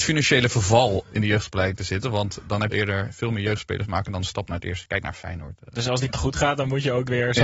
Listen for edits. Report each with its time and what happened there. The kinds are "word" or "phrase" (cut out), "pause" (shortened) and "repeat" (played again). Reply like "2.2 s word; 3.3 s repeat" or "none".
1.0 s word; 2.7 s phrase; 6.1 s phrase